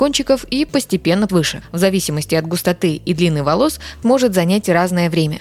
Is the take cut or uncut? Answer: cut